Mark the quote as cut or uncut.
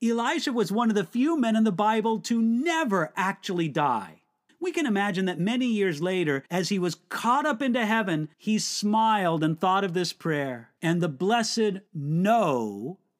cut